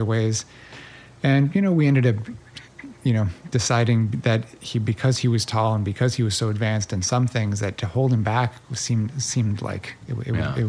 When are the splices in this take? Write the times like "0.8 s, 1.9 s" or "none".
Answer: none